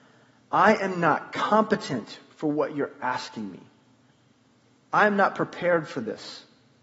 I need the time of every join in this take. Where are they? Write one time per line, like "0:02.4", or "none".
none

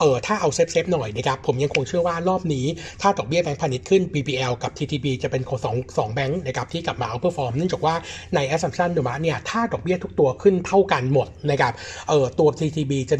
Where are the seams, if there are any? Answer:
none

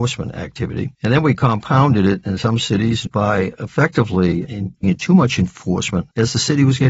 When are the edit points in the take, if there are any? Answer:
0:00.9
0:04.8

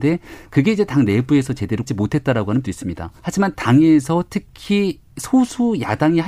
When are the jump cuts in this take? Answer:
0:01.9
0:02.6
0:03.2

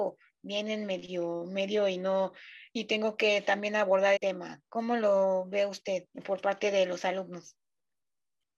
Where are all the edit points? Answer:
0:04.2
0:06.1

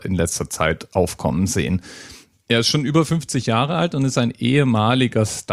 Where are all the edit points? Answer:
none

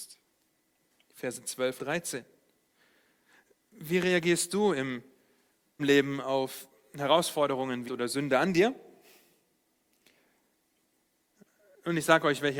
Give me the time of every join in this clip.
0:01.8
0:05.8
0:07.9

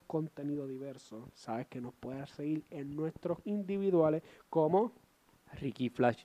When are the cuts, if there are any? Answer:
0:03.4

